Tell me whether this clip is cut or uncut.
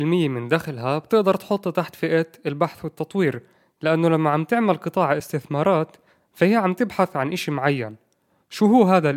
uncut